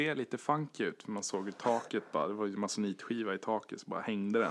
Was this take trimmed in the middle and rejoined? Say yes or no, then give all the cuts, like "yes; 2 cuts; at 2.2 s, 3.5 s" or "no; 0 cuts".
no; 0 cuts